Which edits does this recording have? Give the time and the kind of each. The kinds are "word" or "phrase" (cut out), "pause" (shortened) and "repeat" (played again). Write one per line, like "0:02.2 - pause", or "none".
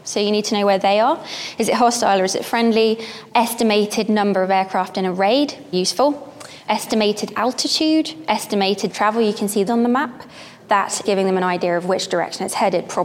0:05.7 - word
0:08.9 - word
0:09.7 - word
0:11.0 - word